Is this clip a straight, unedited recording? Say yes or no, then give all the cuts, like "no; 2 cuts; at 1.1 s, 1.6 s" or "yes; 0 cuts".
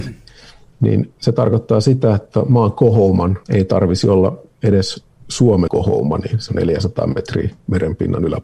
no; 3 cuts; at 3.4 s, 5.7 s, 6.5 s